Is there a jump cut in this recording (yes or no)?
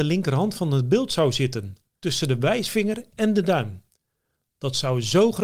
no